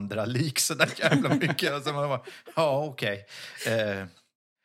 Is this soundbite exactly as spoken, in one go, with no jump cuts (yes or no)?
yes